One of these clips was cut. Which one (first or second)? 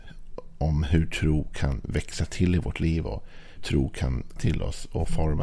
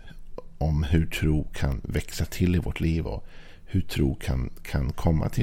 first